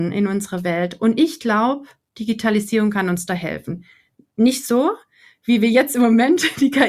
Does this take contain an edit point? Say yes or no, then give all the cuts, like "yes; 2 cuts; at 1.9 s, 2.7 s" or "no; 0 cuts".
no; 0 cuts